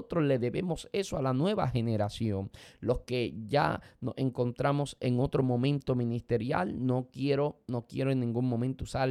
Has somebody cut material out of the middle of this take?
no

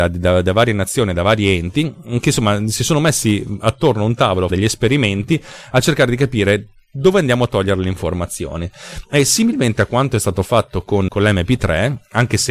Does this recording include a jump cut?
yes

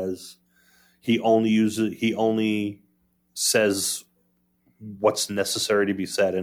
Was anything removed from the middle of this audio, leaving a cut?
no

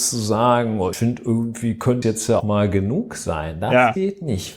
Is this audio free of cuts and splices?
no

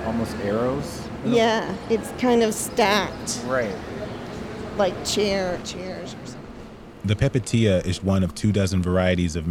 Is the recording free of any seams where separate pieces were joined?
no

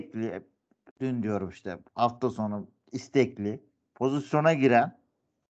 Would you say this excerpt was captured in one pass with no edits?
yes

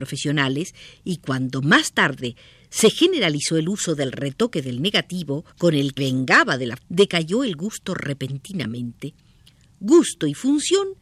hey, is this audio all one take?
no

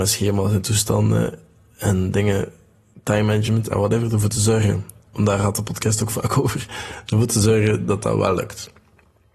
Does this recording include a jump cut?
no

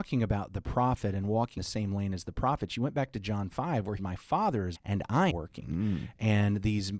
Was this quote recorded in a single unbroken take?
no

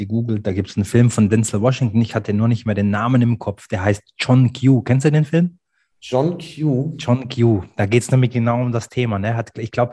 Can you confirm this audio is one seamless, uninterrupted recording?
yes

